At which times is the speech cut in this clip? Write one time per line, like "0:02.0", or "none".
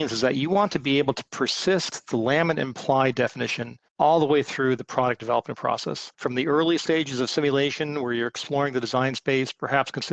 0:03.9
0:06.1